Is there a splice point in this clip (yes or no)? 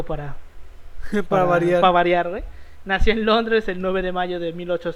no